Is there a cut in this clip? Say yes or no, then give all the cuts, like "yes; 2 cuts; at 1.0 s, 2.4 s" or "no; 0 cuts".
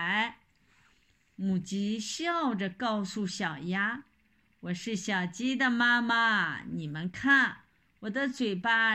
no; 0 cuts